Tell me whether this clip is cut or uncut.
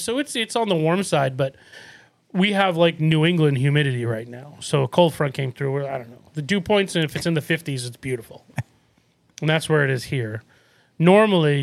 uncut